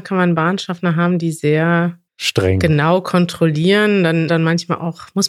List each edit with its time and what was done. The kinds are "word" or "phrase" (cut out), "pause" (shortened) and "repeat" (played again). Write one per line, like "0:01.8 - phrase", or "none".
0:02.1 - pause
0:04.3 - phrase